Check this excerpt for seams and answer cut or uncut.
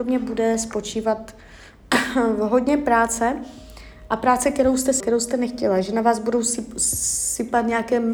cut